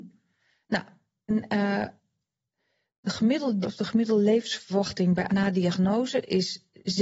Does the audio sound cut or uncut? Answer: cut